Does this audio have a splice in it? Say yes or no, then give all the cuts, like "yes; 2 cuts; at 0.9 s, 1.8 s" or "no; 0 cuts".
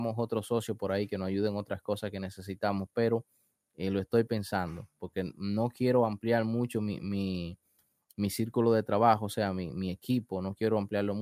no; 0 cuts